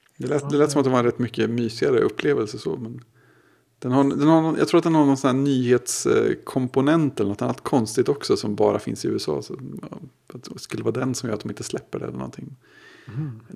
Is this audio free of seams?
yes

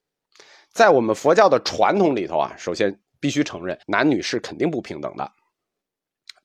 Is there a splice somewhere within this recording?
yes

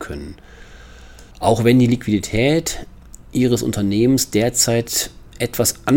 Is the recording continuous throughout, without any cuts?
no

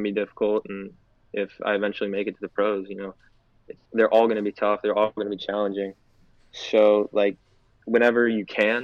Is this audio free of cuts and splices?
yes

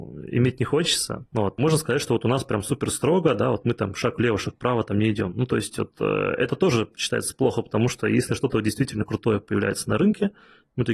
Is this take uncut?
yes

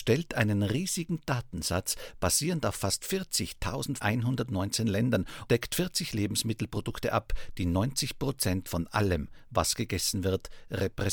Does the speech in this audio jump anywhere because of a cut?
yes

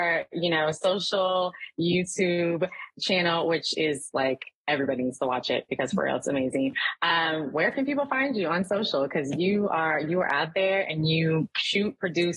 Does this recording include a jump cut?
no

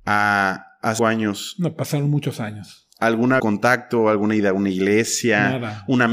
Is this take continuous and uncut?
no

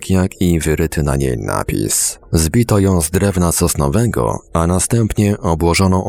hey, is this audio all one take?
yes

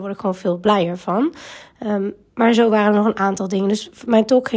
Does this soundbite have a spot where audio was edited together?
no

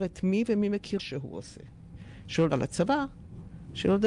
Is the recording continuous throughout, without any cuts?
no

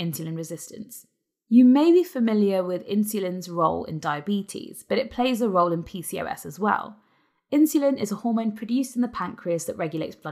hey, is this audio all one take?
yes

